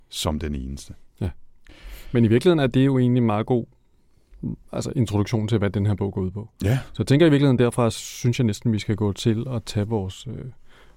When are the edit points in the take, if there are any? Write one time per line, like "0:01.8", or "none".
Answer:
none